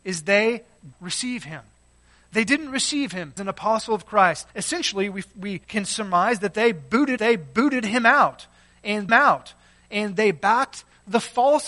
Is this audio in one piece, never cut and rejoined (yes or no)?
no